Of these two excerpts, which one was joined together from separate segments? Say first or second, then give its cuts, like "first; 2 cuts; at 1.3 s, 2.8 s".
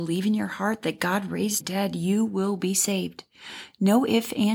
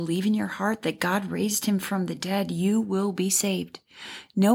first; 1 cut; at 1.6 s